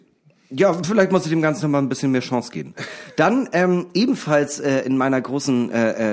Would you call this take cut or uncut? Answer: uncut